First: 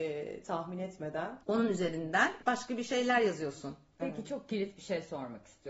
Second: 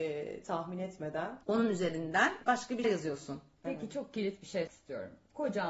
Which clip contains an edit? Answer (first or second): second